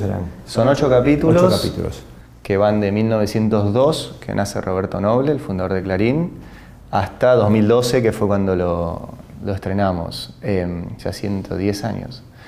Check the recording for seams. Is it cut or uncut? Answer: uncut